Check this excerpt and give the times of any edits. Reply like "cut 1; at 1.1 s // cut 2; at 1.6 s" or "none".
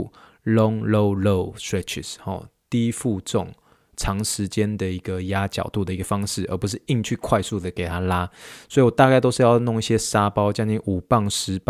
none